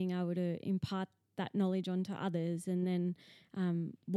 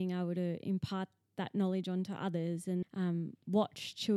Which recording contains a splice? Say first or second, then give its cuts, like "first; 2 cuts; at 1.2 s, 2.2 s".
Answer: second; 1 cut; at 2.8 s